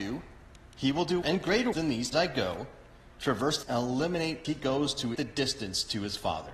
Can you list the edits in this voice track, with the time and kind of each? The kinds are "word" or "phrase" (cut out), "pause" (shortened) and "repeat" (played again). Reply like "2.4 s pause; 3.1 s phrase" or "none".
1.2 s word; 1.7 s word; 2.1 s word; 3.6 s word; 4.4 s word; 5.1 s word